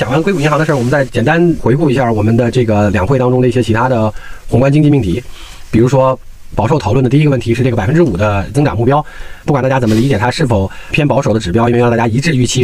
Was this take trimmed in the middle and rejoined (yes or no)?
yes